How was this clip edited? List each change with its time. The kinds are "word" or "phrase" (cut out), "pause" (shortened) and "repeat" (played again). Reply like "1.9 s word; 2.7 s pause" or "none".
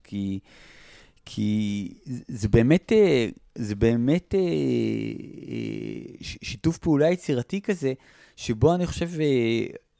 none

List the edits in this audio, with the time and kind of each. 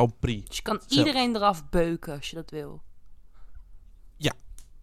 none

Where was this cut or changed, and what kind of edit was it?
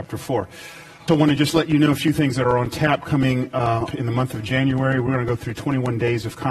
1.1 s word; 3.9 s word

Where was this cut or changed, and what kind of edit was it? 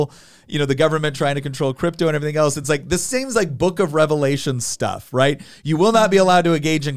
none

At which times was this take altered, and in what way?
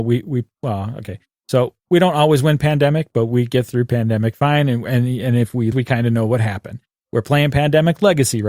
5.7 s word

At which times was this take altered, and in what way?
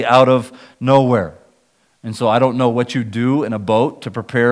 none

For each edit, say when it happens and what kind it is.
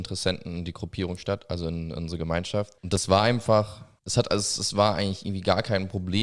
2.8 s pause

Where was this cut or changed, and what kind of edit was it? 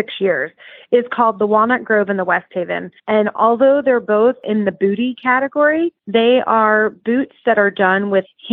3.0 s pause; 6.0 s pause

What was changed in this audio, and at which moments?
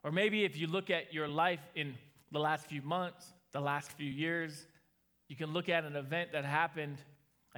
none

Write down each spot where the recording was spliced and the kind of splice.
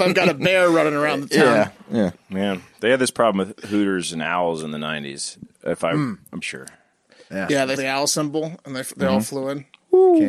6.4 s word; 7.8 s word

